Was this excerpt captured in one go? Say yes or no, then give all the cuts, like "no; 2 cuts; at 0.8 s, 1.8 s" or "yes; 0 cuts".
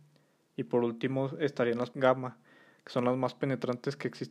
no; 1 cut; at 1.9 s